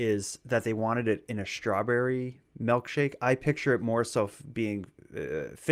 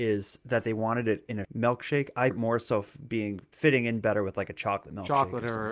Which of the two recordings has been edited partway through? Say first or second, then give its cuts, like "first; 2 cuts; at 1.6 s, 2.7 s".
second; 3 cuts; at 1.4 s, 2.3 s, 3.5 s